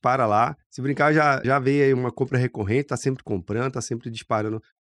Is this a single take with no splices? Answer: no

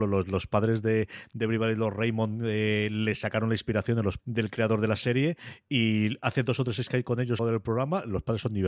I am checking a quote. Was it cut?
yes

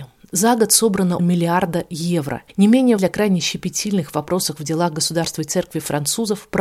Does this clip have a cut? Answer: yes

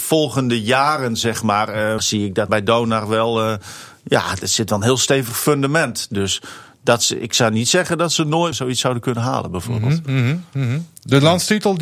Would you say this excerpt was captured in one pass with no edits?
no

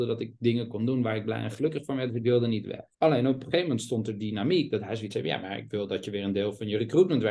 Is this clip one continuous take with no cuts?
no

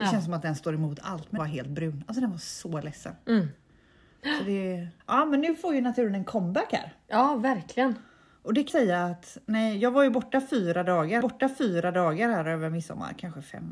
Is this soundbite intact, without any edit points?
no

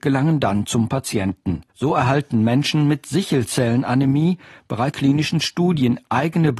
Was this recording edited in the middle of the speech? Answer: yes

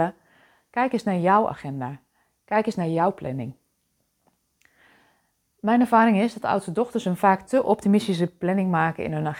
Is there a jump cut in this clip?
no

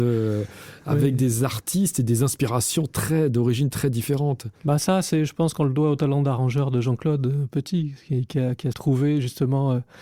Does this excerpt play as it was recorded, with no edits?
no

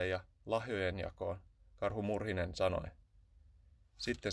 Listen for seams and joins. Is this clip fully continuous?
yes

